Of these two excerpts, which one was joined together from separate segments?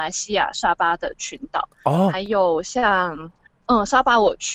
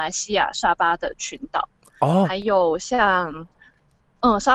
first; 2 cuts; at 1.7 s, 3.5 s

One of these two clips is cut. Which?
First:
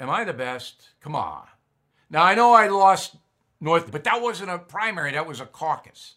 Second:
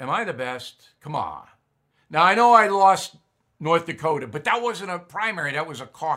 first; 1 cut; at 3.9 s

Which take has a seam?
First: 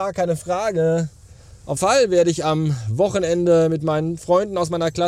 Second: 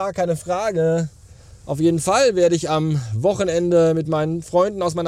first; 1 cut; at 1.8 s

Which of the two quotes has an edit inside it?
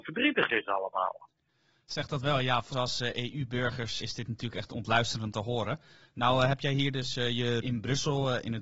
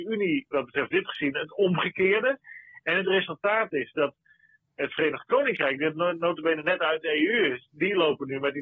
first; 4 cuts; at 2.7 s, 4.0 s, 5.3 s, 7.6 s

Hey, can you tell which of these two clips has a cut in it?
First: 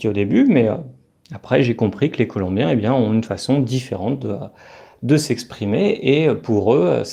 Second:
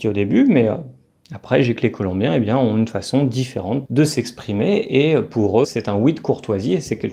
second; 3 cuts; at 1.8 s, 3.8 s, 5.6 s

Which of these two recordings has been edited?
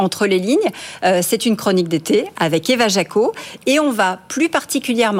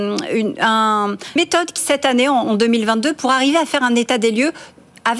second; 2 cuts; at 1.4 s, 1.8 s

